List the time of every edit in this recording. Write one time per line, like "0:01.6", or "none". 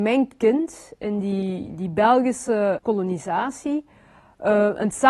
0:02.8